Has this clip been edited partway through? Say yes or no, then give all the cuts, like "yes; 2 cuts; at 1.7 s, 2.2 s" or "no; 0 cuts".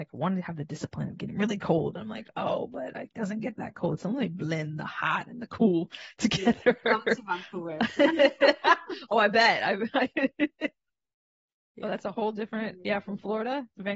no; 0 cuts